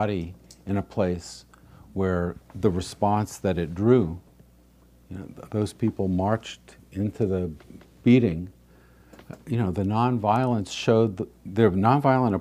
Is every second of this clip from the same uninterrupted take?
yes; 0 cuts

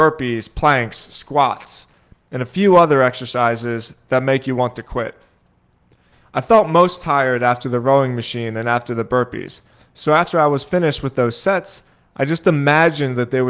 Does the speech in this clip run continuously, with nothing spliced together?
yes; 0 cuts

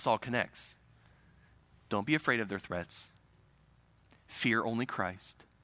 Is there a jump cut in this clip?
no; 0 cuts

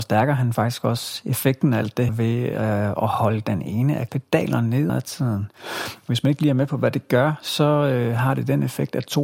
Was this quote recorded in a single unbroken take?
no; 3 cuts; at 2.1 s, 4.1 s, 4.9 s

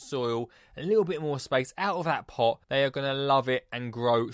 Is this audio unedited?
no; 1 cut; at 2.6 s

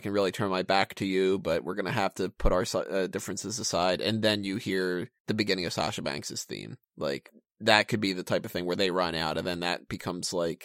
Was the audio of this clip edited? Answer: yes; 2 cuts; at 5.2 s, 6.8 s

